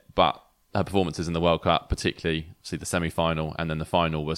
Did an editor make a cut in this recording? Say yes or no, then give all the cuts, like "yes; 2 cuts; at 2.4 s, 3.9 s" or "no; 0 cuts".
no; 0 cuts